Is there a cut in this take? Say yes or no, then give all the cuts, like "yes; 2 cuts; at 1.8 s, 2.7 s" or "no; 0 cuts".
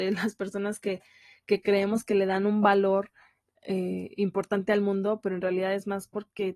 no; 0 cuts